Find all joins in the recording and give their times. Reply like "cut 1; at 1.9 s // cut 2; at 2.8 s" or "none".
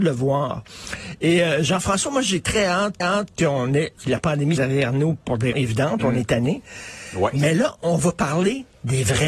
cut 1; at 3.0 s // cut 2; at 4.0 s // cut 3; at 4.6 s // cut 4; at 5.5 s